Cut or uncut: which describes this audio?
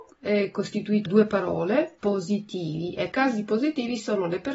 cut